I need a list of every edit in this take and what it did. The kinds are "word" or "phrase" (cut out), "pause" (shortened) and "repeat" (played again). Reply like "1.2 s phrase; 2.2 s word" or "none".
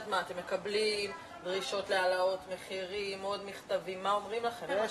none